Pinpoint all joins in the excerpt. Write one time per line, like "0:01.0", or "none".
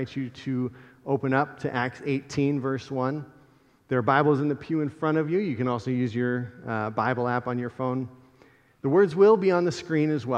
none

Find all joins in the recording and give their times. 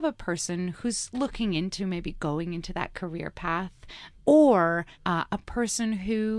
0:04.1
0:04.9

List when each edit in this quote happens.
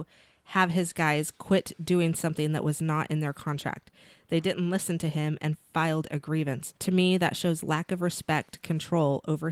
0:06.8

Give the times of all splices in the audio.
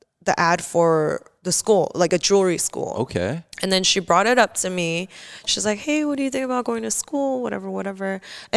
0:03.5

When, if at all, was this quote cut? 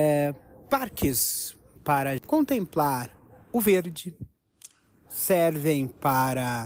0:01.8
0:02.2

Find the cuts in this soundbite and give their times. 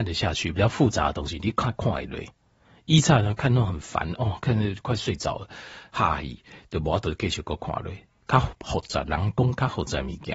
none

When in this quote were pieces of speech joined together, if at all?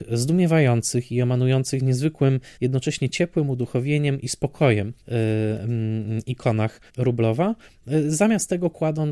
0:02.5
0:05.0
0:06.9

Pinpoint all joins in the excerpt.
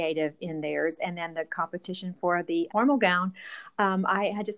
0:02.7

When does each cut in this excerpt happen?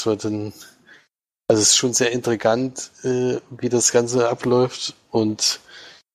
none

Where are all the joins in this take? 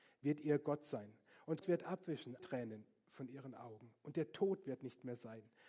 0:01.6
0:02.4

